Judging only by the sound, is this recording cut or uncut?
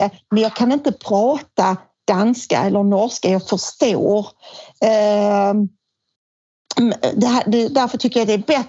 uncut